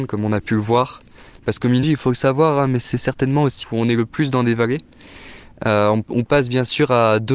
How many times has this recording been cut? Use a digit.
2